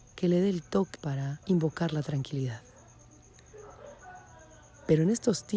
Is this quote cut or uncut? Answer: cut